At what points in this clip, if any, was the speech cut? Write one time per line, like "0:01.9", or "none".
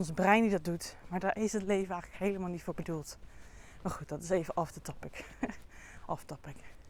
none